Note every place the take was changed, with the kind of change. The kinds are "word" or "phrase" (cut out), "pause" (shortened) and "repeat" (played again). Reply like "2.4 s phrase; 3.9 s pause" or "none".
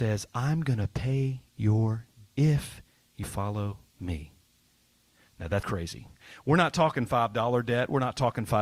2.3 s word; 3.2 s word; 5.6 s word